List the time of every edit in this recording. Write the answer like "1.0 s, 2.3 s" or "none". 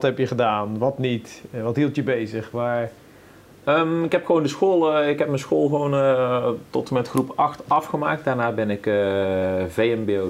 none